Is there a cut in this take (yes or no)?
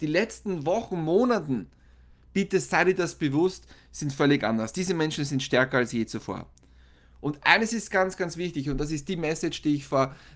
no